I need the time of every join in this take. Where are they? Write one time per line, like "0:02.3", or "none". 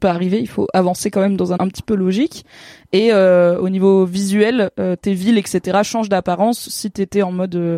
0:01.6